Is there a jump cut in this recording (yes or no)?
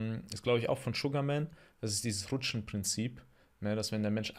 no